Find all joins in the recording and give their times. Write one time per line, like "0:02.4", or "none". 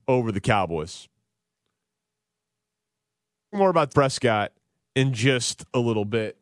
0:03.5
0:03.9